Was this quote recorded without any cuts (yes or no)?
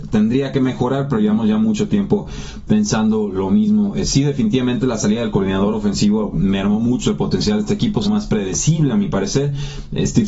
no